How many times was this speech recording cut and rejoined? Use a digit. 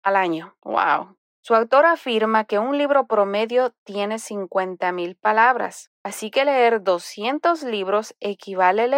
1